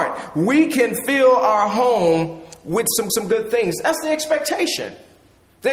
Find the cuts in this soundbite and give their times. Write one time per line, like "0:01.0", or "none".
0:03.1